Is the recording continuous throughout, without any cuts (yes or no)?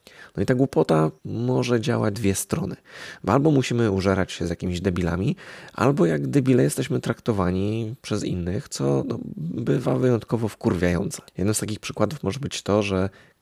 no